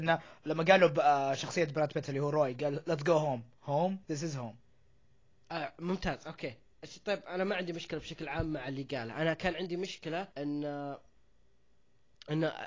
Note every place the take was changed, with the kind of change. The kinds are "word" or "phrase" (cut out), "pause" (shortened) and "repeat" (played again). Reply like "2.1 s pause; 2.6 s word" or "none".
4.0 s pause; 10.3 s pause